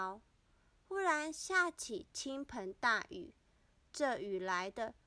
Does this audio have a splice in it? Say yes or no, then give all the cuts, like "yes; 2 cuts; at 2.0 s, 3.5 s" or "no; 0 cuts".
no; 0 cuts